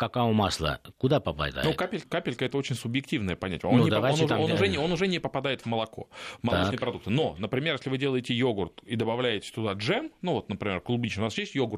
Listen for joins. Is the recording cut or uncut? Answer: cut